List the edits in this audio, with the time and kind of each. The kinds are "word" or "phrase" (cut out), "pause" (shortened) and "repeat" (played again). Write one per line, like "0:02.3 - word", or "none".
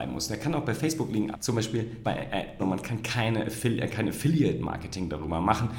0:01.3 - word
0:02.0 - word
0:02.6 - word